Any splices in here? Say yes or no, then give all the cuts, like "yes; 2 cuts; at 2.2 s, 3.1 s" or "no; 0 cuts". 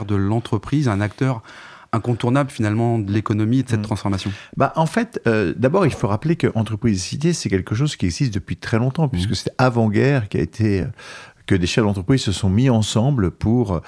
no; 0 cuts